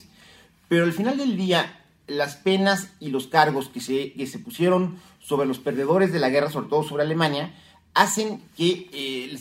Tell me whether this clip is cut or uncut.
uncut